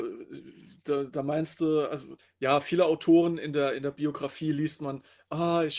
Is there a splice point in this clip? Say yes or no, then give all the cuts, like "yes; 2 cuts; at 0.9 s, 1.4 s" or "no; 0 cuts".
no; 0 cuts